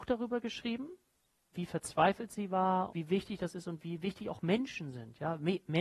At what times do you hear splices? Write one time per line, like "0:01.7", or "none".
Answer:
0:02.9